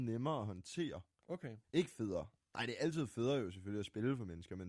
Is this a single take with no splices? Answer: no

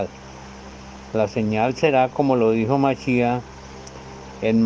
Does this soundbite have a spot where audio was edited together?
no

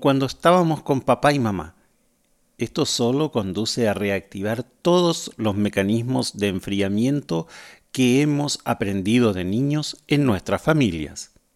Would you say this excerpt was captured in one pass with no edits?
yes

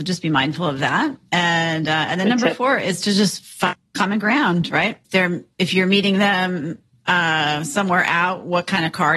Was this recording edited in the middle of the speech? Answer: no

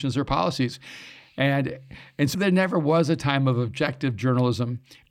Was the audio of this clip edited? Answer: yes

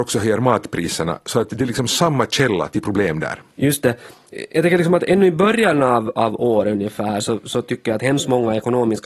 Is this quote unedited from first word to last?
no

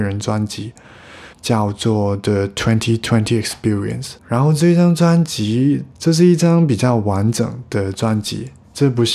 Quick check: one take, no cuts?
no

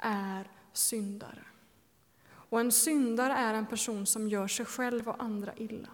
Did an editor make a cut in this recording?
no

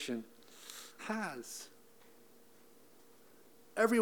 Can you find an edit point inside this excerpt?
yes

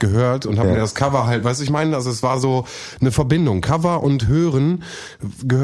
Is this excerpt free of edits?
yes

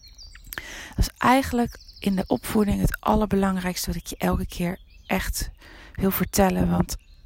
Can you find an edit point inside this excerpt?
no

